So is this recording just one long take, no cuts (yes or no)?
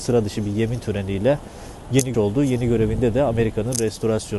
no